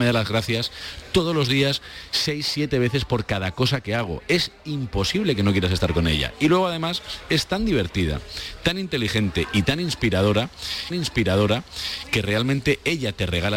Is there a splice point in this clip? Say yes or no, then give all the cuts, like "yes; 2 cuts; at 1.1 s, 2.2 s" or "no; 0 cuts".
yes; 1 cut; at 10.9 s